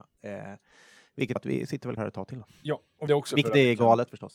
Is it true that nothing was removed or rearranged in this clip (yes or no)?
no